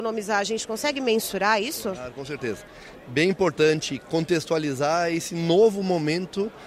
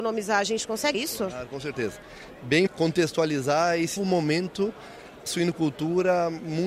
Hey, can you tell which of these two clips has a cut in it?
second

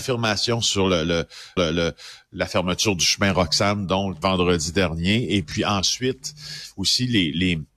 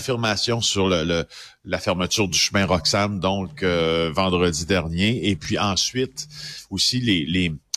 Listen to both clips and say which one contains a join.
first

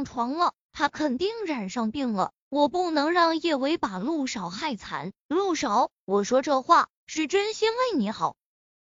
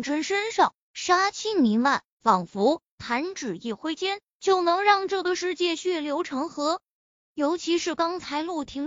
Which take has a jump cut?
second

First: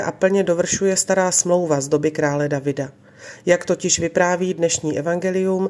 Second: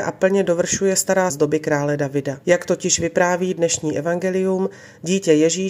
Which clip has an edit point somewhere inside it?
second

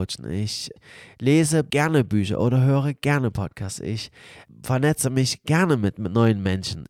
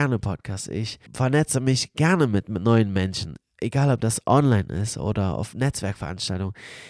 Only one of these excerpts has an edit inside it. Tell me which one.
second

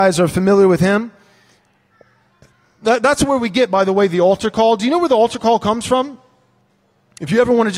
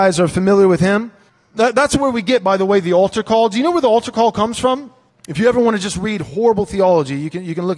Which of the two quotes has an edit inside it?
second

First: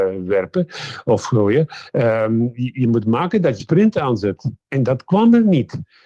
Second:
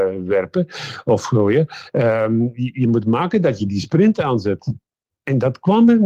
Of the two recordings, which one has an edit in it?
first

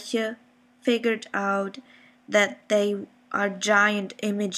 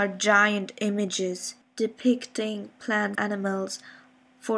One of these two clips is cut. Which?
second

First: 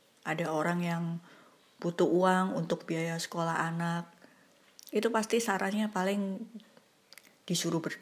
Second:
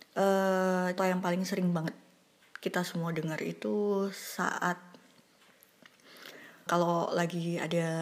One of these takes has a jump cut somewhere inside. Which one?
second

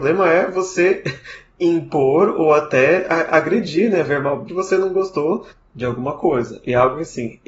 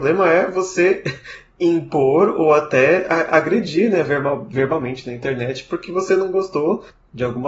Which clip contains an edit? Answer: first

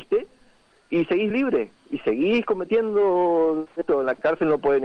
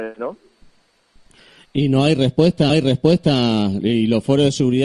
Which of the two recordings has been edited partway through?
second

